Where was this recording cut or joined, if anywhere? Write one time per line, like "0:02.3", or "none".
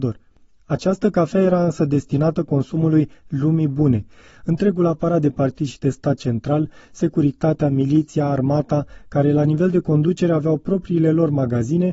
none